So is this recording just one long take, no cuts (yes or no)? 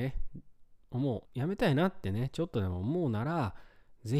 no